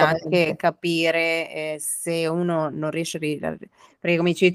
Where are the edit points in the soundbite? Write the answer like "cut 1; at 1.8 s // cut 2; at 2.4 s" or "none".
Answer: none